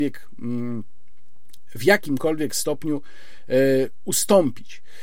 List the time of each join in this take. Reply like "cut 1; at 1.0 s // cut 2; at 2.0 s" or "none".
none